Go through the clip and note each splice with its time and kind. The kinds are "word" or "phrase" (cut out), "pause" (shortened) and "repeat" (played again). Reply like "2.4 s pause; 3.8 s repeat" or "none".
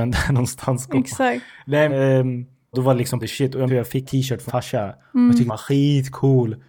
1.9 s word; 2.7 s word; 3.2 s word; 3.7 s word; 4.0 s word; 4.5 s word; 5.5 s word